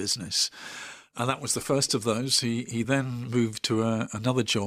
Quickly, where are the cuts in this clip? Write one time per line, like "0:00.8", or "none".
none